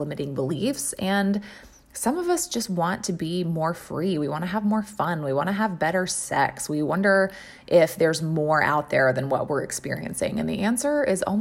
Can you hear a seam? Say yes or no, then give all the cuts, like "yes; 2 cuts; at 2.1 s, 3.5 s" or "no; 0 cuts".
no; 0 cuts